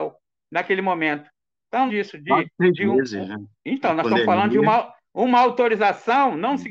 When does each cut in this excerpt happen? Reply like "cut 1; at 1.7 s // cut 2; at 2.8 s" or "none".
cut 1; at 1.9 s // cut 2; at 3.6 s